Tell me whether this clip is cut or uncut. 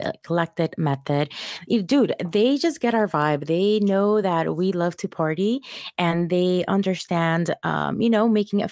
uncut